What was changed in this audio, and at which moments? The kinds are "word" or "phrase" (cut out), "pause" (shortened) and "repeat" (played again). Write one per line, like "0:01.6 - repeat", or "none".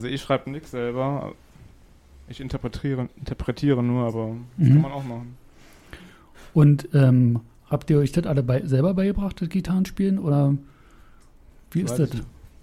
none